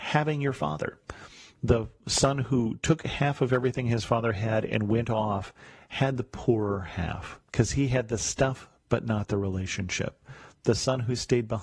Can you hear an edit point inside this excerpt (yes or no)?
yes